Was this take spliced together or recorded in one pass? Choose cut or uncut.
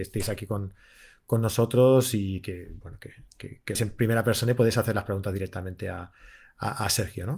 cut